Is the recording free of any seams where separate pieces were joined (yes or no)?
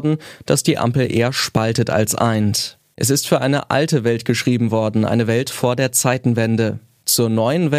yes